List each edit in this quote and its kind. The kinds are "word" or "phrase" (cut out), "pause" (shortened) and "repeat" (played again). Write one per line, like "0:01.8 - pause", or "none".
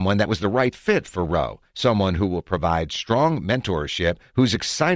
none